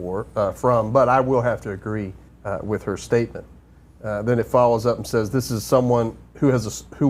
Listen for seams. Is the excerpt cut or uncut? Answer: cut